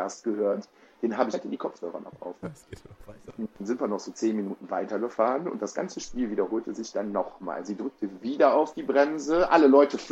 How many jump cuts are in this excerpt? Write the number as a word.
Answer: two